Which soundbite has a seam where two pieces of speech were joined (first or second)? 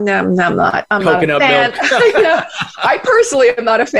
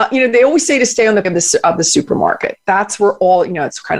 second